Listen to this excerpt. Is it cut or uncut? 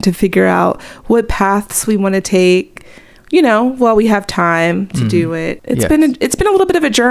uncut